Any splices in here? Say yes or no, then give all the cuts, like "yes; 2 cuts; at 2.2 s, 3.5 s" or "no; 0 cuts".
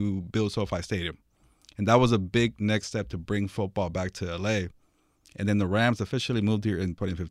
no; 0 cuts